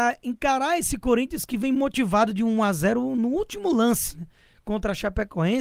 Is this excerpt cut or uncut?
uncut